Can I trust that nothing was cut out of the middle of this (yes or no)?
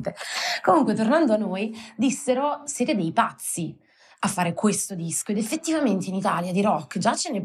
yes